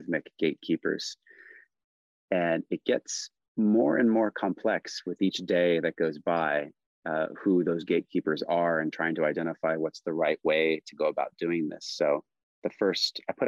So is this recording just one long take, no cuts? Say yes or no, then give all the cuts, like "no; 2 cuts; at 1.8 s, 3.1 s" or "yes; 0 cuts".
yes; 0 cuts